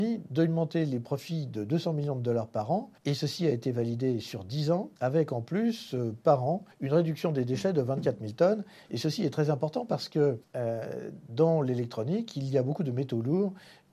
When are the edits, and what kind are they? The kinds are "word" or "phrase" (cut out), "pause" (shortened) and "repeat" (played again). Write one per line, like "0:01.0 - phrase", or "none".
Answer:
0:03.0 - pause
0:05.0 - pause
0:06.7 - pause
0:10.4 - pause

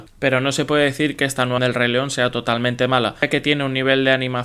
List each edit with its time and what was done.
0:01.6 - word

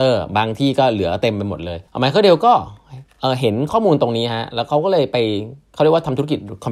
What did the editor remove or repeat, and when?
0:01.9 - pause

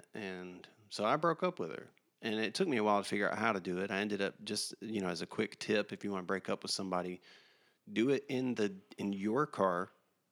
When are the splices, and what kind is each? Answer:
none

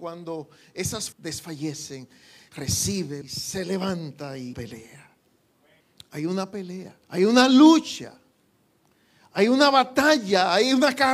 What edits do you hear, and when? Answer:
0:01.1 - word
0:03.2 - phrase
0:04.5 - phrase
0:05.8 - pause
0:07.0 - pause

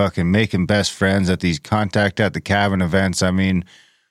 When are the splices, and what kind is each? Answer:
none

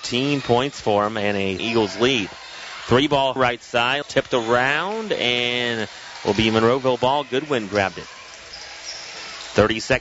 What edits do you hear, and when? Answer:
0:01.6 - word
0:03.4 - word
0:04.0 - phrase

